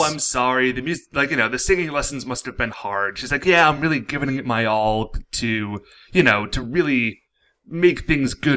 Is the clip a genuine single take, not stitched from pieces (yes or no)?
yes